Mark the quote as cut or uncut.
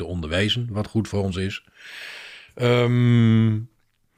uncut